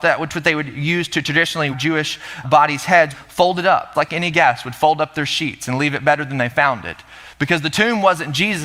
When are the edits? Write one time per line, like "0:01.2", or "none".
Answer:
0:01.7
0:02.4
0:03.1
0:03.9
0:04.3